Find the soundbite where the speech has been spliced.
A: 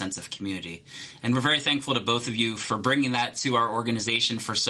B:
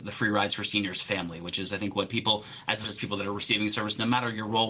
B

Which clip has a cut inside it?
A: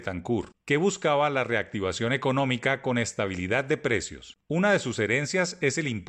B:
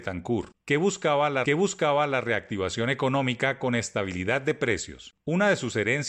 B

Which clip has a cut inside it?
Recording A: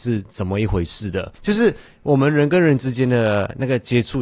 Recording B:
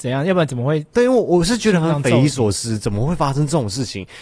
A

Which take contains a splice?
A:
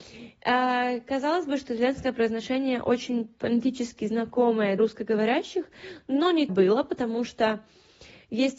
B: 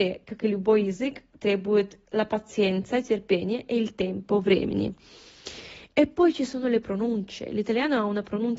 A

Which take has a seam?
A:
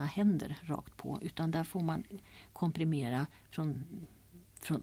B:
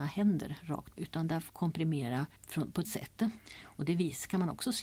B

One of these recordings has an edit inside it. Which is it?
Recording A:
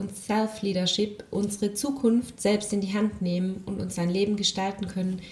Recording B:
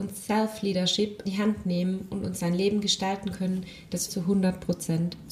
B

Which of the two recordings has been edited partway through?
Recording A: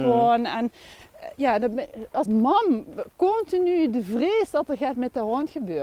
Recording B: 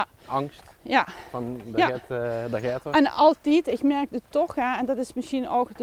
A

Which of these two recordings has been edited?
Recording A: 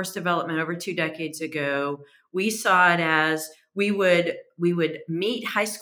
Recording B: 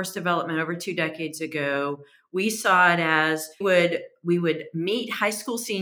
B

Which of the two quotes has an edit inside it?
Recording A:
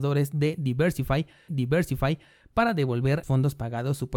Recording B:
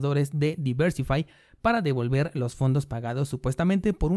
A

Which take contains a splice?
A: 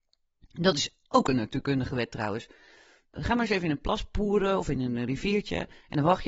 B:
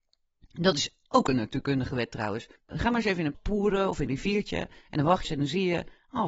B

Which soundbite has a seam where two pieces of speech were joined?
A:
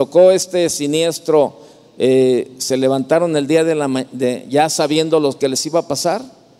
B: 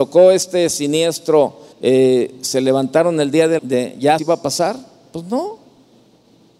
B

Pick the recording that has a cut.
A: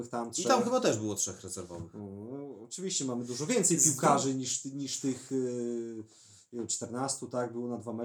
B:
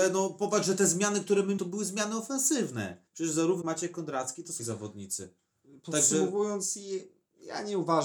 B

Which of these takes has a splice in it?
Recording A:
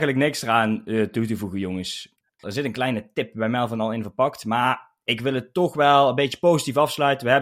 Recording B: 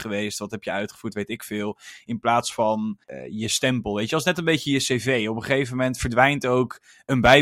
B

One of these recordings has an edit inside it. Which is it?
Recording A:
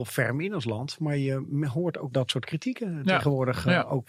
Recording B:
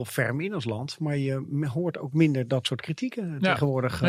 A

